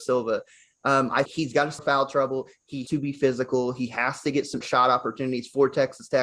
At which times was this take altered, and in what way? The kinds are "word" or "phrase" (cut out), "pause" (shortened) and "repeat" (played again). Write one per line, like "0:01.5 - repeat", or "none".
0:01.3 - word
0:01.8 - word
0:02.9 - word
0:04.6 - word